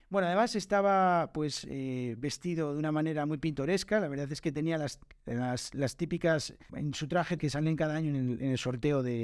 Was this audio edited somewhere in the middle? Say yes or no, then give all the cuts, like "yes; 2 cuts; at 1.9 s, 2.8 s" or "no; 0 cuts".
yes; 2 cuts; at 6.7 s, 7.4 s